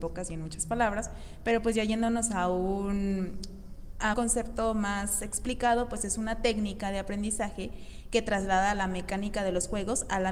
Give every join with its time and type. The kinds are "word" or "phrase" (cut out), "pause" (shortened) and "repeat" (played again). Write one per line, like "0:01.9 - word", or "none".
0:04.1 - word